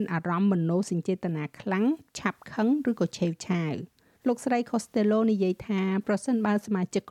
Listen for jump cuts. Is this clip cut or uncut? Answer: uncut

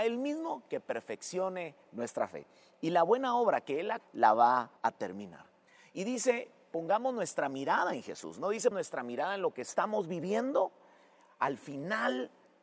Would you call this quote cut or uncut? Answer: cut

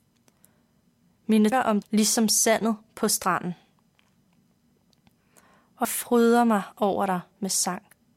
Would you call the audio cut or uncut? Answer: cut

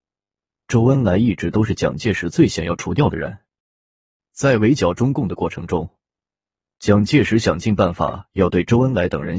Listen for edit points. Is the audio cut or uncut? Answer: uncut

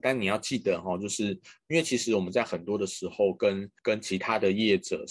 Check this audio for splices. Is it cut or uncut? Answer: cut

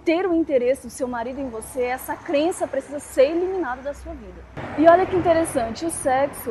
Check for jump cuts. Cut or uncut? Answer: uncut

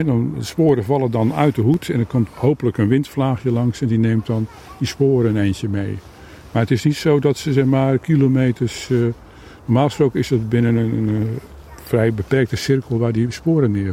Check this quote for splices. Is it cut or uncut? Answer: cut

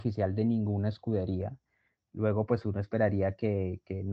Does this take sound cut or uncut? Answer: uncut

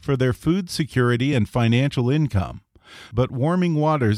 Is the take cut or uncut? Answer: uncut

